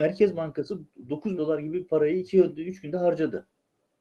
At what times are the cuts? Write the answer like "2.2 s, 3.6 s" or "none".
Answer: 1.4 s